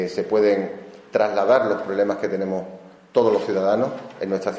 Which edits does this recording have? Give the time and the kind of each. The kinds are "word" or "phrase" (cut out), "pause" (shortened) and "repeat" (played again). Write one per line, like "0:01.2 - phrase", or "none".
none